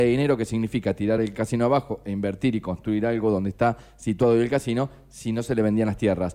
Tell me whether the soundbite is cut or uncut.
uncut